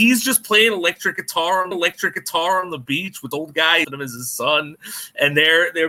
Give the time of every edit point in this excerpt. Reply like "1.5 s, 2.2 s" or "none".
1.7 s, 3.3 s, 3.8 s